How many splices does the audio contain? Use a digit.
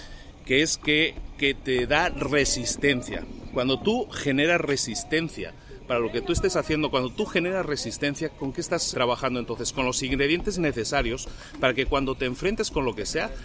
1